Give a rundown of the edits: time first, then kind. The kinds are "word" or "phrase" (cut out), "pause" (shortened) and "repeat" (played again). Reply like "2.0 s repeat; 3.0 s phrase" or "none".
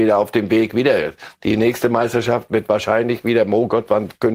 none